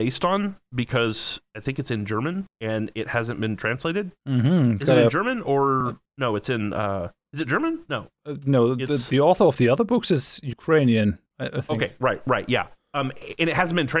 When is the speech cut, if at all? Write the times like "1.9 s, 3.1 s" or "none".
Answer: none

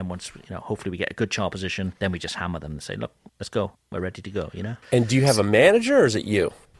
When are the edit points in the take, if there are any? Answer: 2.0 s, 3.3 s, 4.8 s

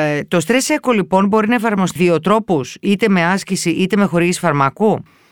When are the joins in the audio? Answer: 2.0 s

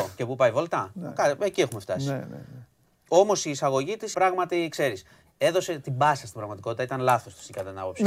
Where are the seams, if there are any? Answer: 4.1 s

